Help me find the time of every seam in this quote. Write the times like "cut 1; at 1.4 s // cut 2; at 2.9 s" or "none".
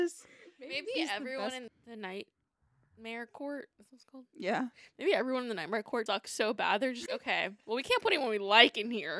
cut 1; at 1.7 s // cut 2; at 6.1 s // cut 3; at 7.1 s

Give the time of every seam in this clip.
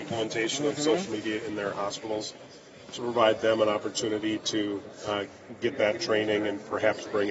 none

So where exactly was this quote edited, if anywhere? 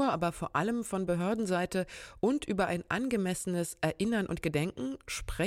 none

